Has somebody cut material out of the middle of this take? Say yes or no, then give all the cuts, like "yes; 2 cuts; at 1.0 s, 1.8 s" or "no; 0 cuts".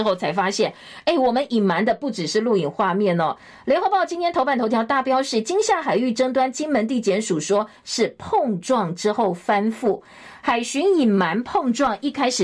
no; 0 cuts